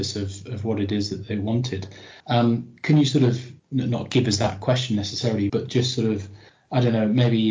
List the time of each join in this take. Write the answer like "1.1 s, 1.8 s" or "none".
2.2 s, 3.6 s, 5.5 s, 6.5 s